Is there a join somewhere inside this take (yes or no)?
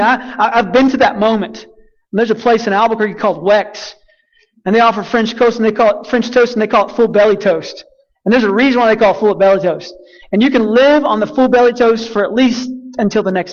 no